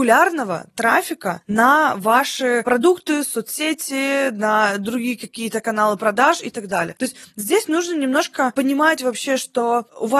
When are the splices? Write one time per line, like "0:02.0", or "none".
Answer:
none